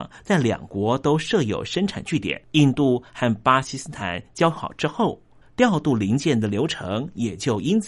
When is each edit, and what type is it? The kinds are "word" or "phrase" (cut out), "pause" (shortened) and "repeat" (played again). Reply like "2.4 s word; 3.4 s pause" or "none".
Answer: 2.4 s pause; 5.4 s pause